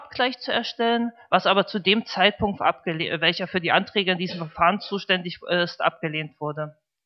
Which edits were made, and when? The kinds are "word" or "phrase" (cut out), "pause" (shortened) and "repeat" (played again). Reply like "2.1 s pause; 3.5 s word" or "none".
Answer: 2.6 s phrase